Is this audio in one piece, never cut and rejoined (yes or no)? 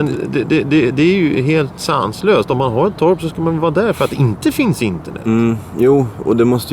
yes